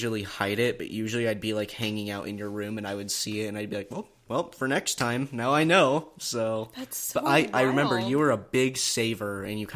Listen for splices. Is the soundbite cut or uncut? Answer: uncut